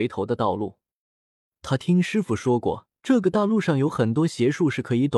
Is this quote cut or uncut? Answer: cut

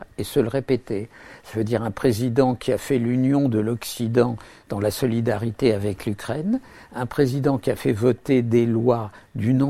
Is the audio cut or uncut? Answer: uncut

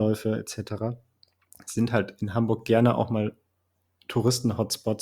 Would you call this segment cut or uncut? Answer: uncut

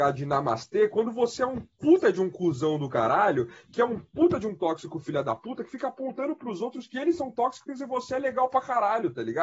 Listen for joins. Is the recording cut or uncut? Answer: uncut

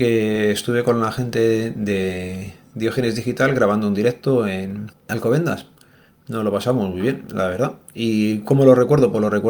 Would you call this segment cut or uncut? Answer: uncut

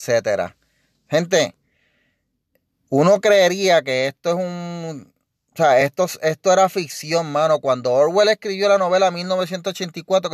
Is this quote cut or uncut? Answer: uncut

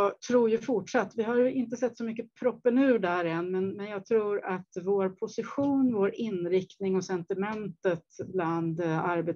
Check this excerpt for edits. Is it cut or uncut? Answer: uncut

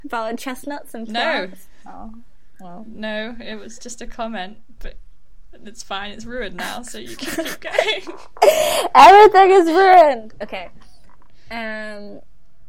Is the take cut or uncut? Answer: uncut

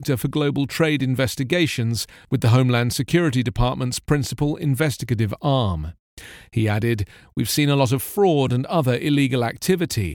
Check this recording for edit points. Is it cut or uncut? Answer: uncut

